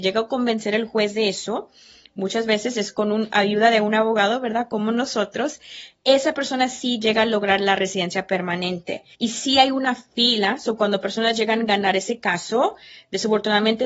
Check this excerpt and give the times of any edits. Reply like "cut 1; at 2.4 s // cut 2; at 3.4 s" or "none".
cut 1; at 9.1 s